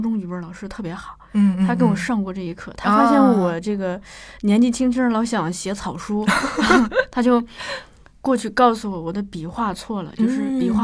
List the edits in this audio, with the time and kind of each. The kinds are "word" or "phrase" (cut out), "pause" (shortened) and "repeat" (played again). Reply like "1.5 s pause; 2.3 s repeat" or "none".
none